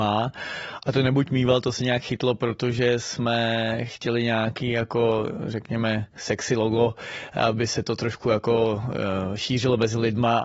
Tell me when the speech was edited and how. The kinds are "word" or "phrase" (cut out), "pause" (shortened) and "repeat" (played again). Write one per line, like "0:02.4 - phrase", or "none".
0:06.1 - pause